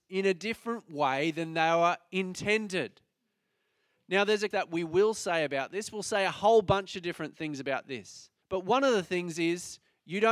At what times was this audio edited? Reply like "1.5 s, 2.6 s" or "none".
4.5 s, 8.4 s